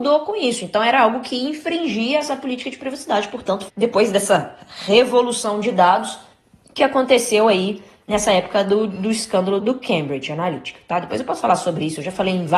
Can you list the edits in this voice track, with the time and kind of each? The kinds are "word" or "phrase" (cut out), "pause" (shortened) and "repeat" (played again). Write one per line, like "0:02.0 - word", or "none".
0:03.7 - phrase
0:09.6 - word

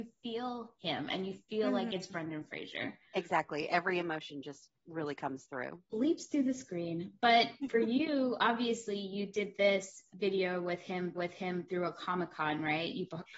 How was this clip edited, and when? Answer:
0:03.1 - pause
0:11.1 - repeat

